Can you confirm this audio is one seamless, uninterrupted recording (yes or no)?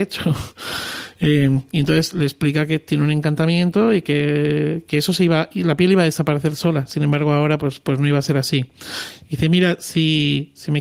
yes